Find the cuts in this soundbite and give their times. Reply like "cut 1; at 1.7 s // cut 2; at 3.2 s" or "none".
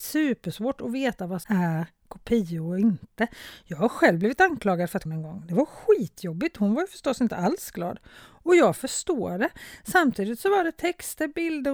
cut 1; at 1.4 s // cut 2; at 5.1 s